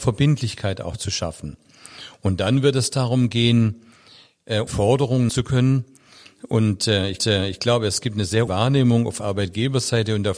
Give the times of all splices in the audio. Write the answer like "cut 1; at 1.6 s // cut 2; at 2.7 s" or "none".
cut 1; at 4.7 s // cut 2; at 5.3 s // cut 3; at 7.2 s // cut 4; at 8.5 s